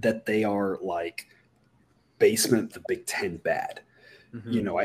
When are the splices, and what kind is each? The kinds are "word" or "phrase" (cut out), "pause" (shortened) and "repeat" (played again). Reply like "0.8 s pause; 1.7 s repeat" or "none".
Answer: 2.7 s word